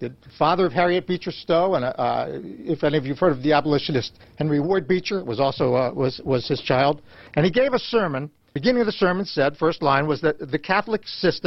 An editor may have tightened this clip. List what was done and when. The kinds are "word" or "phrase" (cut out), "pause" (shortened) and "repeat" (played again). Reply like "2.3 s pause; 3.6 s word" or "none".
none